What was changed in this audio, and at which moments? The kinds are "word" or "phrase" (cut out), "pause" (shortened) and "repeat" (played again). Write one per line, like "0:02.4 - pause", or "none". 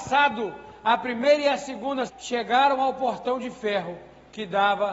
0:02.1 - word